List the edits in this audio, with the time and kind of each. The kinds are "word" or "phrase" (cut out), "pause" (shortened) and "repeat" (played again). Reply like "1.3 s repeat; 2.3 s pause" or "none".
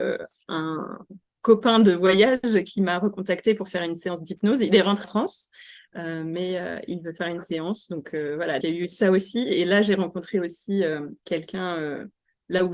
5.0 s word; 8.6 s word